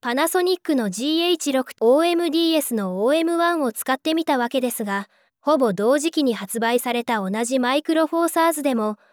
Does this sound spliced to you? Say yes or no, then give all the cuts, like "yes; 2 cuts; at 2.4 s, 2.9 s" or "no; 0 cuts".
yes; 2 cuts; at 1.7 s, 5.3 s